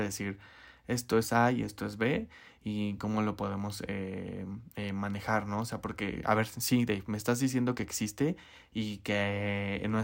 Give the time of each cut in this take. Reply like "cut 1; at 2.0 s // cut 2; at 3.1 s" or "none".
none